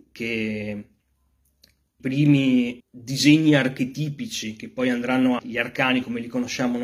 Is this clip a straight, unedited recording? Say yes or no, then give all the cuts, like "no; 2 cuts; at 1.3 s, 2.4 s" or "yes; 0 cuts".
no; 3 cuts; at 2.0 s, 2.8 s, 5.4 s